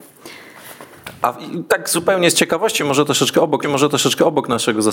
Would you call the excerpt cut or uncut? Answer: cut